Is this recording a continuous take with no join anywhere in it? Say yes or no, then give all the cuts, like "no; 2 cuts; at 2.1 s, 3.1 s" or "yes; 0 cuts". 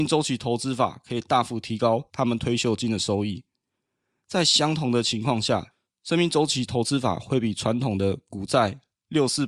yes; 0 cuts